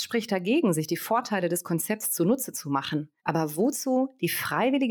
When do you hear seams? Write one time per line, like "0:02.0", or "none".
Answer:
0:03.2